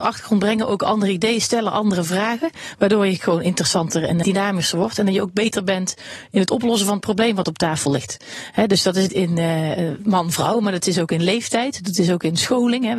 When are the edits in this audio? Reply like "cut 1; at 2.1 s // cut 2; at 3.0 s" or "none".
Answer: cut 1; at 3.2 s // cut 2; at 4.2 s // cut 3; at 9.1 s

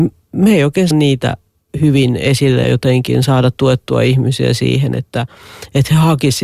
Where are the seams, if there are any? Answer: cut 1; at 0.9 s // cut 2; at 1.7 s // cut 3; at 2.6 s

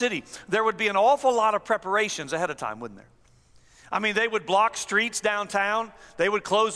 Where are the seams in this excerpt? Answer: none

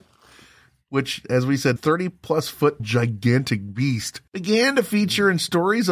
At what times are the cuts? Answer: cut 1; at 1.8 s // cut 2; at 2.8 s // cut 3; at 4.3 s

